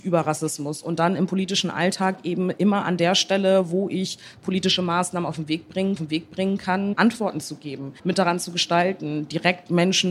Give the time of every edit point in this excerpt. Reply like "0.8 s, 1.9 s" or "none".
6.0 s, 8.0 s